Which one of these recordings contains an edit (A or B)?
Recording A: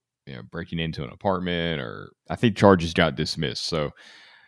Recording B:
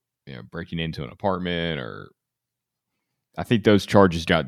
A